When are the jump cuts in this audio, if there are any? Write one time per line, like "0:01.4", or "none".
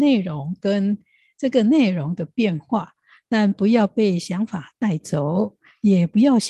none